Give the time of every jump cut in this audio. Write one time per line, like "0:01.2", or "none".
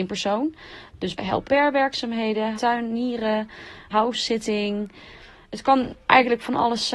0:01.2
0:01.5
0:02.6
0:03.9